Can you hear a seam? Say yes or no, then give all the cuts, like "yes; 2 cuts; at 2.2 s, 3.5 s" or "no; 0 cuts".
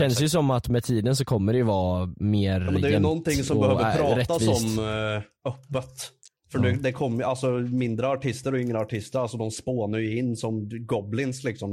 no; 0 cuts